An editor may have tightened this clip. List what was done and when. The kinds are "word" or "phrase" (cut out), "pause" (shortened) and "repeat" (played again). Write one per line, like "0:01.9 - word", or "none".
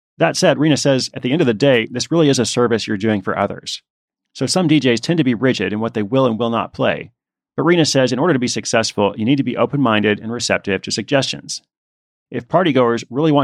none